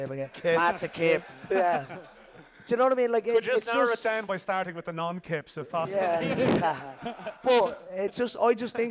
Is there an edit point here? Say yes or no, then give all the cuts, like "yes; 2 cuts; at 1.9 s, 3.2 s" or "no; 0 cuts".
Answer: no; 0 cuts